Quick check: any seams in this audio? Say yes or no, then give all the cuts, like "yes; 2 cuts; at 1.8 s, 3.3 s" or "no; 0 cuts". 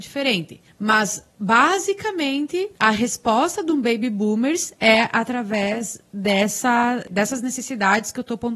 no; 0 cuts